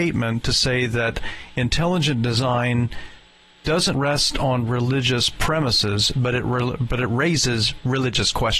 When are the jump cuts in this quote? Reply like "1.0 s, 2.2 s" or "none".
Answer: none